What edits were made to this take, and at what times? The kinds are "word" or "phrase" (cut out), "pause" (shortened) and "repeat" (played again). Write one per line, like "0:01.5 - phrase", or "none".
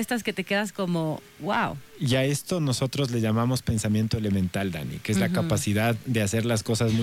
0:01.3 - pause